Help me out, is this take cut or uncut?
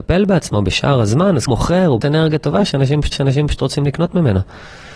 cut